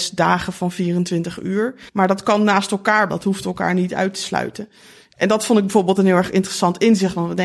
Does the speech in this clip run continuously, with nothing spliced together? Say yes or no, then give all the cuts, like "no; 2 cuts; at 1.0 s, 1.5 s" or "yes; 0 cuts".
no; 2 cuts; at 1.9 s, 3.1 s